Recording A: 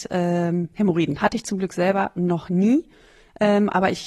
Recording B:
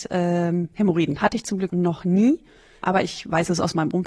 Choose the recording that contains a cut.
B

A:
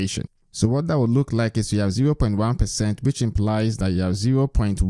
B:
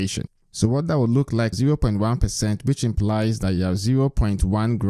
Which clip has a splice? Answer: B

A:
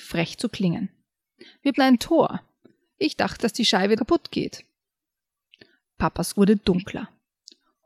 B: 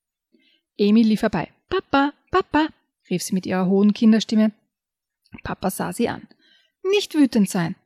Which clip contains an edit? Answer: A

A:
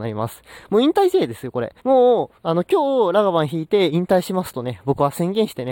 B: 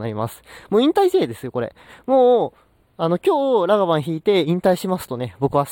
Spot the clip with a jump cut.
A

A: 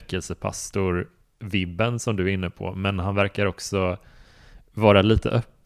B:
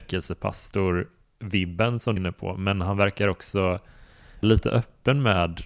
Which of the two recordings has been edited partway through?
B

